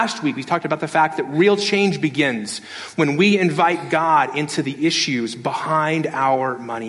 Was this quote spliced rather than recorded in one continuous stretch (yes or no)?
no